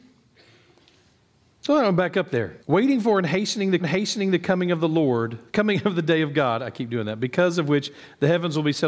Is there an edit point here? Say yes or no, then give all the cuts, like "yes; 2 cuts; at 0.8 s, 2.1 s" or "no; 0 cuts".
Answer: yes; 3 cuts; at 2.6 s, 3.8 s, 5.5 s